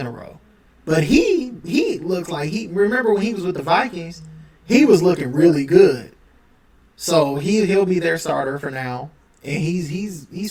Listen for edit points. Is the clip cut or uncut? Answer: uncut